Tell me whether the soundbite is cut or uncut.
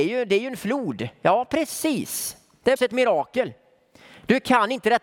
cut